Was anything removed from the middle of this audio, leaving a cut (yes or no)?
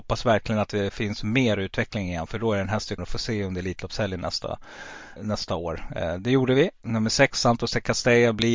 yes